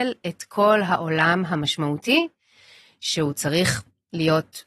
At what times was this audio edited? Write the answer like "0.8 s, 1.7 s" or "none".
none